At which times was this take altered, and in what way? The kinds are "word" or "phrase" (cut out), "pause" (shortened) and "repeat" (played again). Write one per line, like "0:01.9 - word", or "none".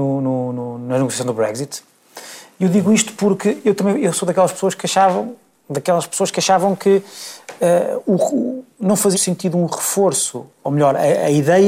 0:09.1 - word
0:10.6 - word

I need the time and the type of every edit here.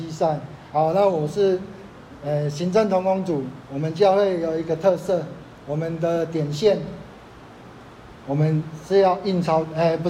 0:08.2 - pause

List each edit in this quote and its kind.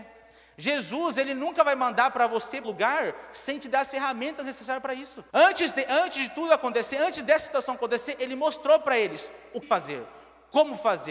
0:02.6 - word
0:05.3 - pause
0:09.6 - word

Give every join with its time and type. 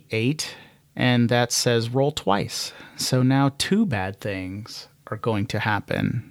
none

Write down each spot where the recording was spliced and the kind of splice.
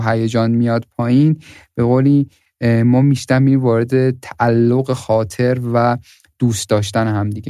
none

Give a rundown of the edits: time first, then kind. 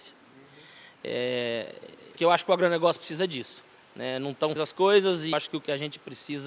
0:02.2 - word
0:03.8 - pause
0:04.6 - word
0:05.3 - word

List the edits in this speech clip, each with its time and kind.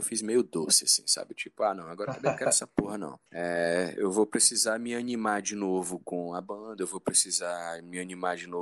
0:03.2 - pause

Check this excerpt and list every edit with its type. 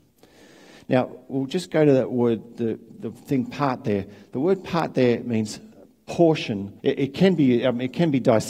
0:06.8 - pause

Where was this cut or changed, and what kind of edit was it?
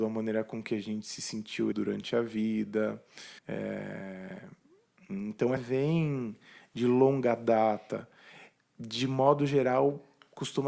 0:01.7 - word
0:03.4 - pause
0:05.6 - phrase

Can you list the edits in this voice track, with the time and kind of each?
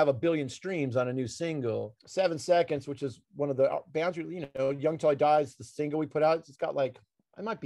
0:02.0 - pause

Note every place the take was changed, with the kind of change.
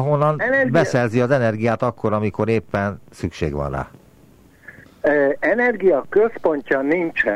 none

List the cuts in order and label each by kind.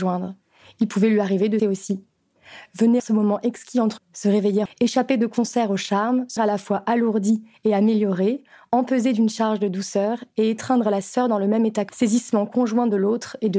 0:01.6 - word
0:03.0 - word
0:04.0 - word
0:04.7 - word
0:06.4 - word
0:11.9 - word

